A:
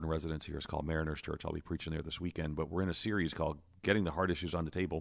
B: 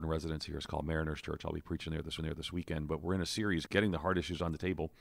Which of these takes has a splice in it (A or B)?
B